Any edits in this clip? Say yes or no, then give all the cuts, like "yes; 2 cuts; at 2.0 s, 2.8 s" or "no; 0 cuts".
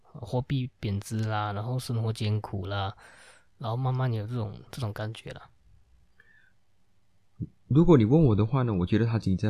yes; 1 cut; at 4.7 s